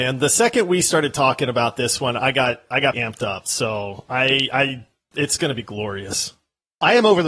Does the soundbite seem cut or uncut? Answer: cut